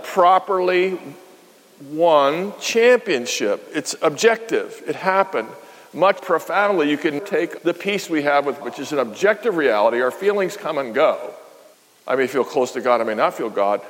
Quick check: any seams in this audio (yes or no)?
yes